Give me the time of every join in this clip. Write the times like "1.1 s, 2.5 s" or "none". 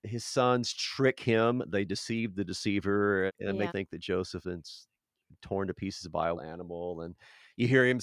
3.3 s, 3.7 s, 4.4 s, 6.4 s